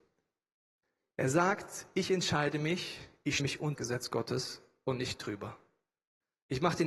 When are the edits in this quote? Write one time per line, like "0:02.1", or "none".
0:03.4
0:03.8